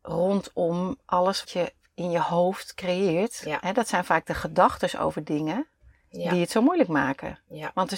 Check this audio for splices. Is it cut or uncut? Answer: cut